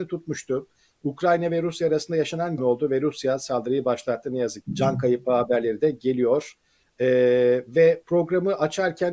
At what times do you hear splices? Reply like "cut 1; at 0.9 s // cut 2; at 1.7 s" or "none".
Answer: cut 1; at 2.6 s // cut 2; at 4.6 s